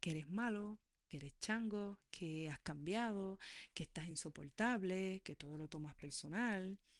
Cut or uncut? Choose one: uncut